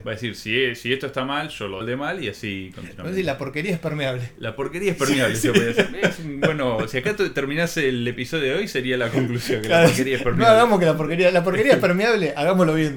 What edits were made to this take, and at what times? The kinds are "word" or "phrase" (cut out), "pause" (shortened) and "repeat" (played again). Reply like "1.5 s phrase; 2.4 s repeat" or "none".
1.8 s word